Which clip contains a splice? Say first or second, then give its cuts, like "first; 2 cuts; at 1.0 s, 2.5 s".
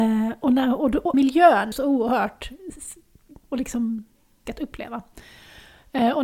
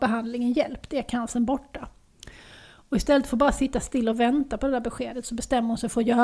first; 4 cuts; at 1.1 s, 1.7 s, 3.4 s, 4.5 s